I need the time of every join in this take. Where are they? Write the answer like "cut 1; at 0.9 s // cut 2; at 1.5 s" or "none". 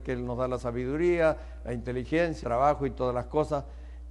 cut 1; at 2.4 s